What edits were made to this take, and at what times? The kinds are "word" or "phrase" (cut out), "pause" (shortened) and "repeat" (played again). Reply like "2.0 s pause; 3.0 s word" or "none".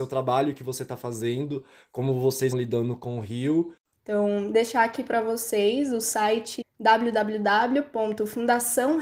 2.5 s word; 6.6 s word